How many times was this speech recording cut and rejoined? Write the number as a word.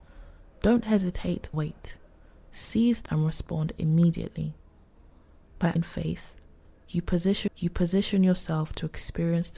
four